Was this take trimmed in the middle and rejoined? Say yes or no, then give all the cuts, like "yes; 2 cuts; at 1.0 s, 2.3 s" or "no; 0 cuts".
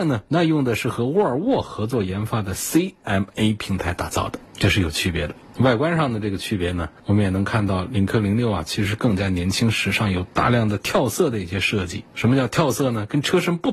yes; 1 cut; at 10.3 s